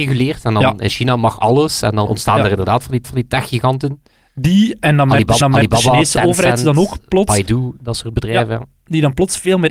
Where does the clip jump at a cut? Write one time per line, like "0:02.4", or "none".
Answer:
0:02.1
0:03.0
0:05.4